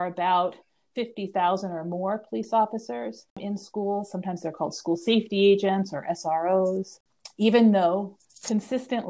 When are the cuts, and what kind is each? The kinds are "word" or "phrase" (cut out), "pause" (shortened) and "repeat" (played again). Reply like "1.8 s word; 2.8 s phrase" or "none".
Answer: none